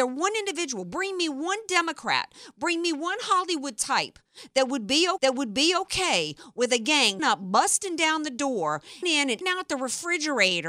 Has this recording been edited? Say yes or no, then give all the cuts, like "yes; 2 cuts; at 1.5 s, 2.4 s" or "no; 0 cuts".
yes; 4 cuts; at 5.2 s, 7.2 s, 9.0 s, 9.4 s